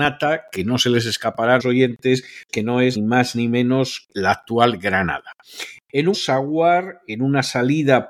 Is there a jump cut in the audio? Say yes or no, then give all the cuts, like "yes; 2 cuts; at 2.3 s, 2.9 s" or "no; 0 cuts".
yes; 5 cuts; at 1.6 s, 2.5 s, 3.0 s, 4.1 s, 6.1 s